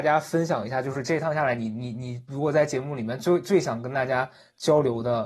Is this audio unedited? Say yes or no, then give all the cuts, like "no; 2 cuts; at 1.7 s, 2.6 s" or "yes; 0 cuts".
yes; 0 cuts